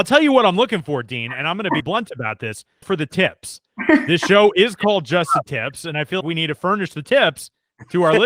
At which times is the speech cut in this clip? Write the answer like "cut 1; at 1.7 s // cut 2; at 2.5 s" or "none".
cut 1; at 1.8 s // cut 2; at 2.8 s // cut 3; at 6.2 s